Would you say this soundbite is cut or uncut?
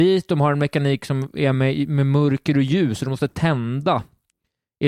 uncut